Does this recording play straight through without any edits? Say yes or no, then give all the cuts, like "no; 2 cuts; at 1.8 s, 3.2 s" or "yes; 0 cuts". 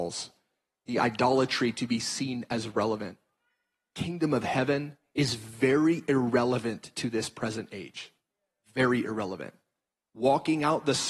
yes; 0 cuts